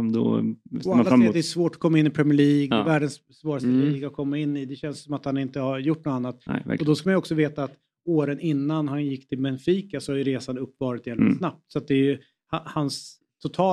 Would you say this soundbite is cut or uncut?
uncut